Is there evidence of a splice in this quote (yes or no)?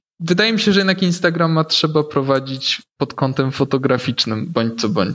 no